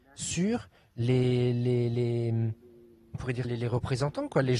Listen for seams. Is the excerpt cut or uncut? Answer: cut